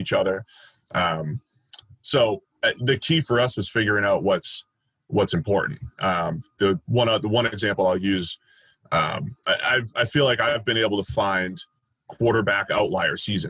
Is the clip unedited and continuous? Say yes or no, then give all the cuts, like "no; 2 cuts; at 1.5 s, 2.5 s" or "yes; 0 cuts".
yes; 0 cuts